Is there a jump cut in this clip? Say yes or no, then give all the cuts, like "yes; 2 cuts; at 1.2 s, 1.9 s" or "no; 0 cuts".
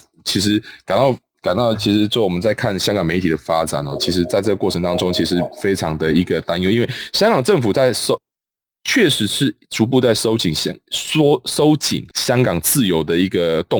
yes; 1 cut; at 12.1 s